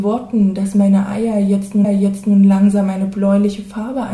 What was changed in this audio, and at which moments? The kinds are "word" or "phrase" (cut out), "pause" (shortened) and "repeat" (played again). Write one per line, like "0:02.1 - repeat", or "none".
0:01.8 - repeat